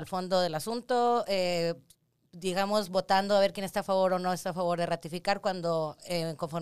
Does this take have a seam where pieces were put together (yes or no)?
no